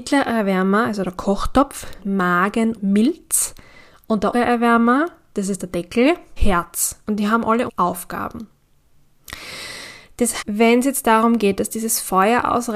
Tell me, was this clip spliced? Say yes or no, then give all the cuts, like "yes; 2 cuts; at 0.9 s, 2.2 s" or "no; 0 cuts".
yes; 6 cuts; at 2.0 s, 2.7 s, 4.3 s, 6.4 s, 7.7 s, 10.4 s